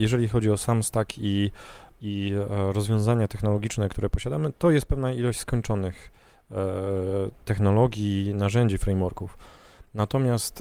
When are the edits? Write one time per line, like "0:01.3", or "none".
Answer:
none